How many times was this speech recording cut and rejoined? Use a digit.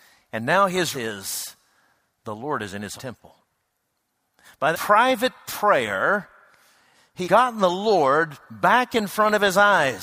4